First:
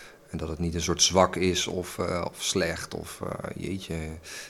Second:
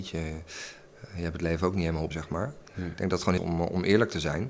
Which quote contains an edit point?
second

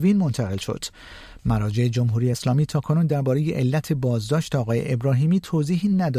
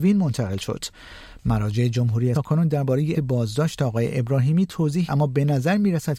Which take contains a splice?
second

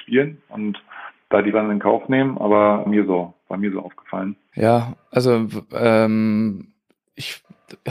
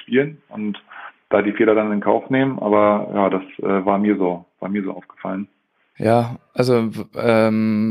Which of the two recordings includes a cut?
first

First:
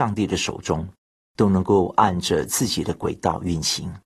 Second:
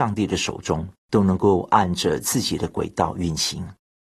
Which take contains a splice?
second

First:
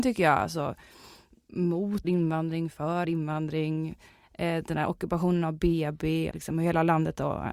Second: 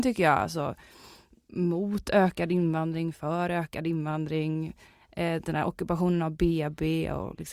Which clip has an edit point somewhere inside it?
first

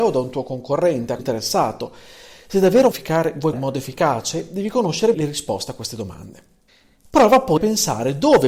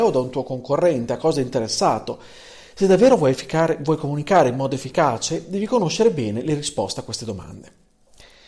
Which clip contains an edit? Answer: first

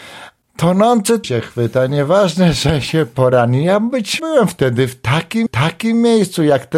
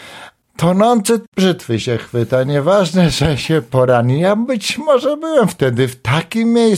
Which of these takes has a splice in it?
first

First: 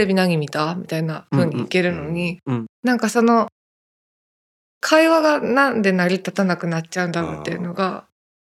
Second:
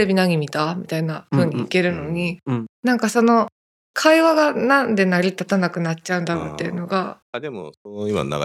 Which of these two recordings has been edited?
second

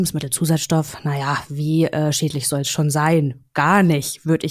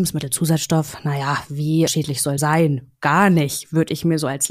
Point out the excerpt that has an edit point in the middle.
second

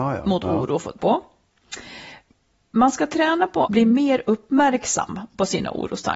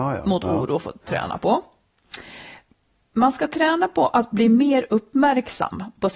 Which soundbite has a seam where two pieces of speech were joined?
first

